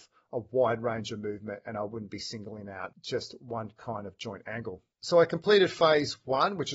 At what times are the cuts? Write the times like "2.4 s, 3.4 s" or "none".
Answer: 4.9 s